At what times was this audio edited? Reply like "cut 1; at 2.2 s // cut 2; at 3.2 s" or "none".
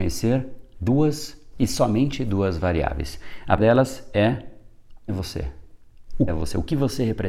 cut 1; at 1.5 s // cut 2; at 3.6 s // cut 3; at 5.1 s // cut 4; at 6.3 s